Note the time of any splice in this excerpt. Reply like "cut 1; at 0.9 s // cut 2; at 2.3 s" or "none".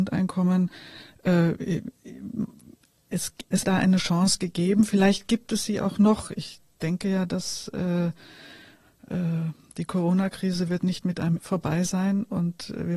cut 1; at 3.6 s // cut 2; at 11.4 s